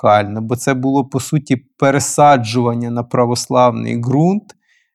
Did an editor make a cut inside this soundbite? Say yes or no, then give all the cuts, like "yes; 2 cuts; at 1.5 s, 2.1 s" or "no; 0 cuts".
no; 0 cuts